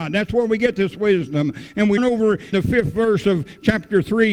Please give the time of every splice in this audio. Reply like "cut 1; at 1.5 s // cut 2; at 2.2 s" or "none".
cut 1; at 2.0 s // cut 2; at 2.5 s